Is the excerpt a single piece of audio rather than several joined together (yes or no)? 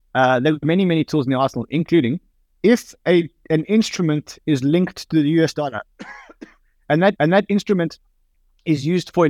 no